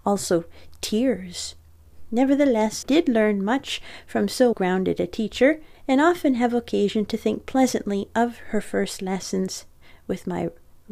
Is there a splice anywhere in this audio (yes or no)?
yes